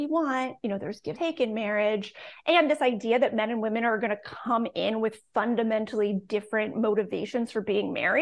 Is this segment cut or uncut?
cut